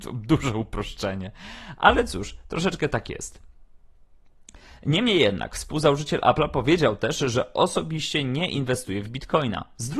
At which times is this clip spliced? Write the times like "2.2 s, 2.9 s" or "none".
none